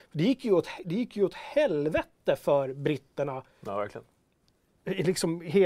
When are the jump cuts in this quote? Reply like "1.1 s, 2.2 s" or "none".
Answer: none